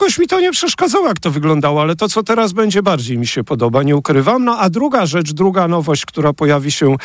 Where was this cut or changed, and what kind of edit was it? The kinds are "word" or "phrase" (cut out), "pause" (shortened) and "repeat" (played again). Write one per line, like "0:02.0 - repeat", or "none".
none